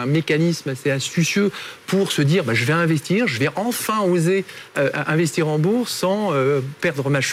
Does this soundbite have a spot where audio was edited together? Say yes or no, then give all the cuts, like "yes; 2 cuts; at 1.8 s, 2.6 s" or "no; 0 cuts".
no; 0 cuts